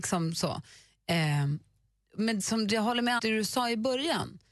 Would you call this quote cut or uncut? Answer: cut